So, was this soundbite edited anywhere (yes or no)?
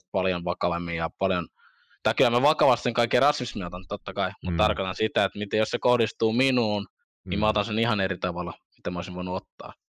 no